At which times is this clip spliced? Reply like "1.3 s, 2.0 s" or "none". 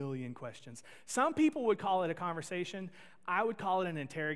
none